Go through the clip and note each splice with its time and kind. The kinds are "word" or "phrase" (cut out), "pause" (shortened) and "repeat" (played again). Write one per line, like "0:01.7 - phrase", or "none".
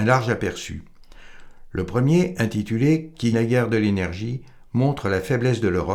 0:03.3 - word